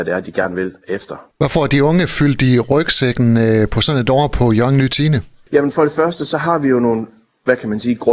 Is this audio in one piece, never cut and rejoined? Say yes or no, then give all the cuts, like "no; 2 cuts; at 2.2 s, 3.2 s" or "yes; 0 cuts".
yes; 0 cuts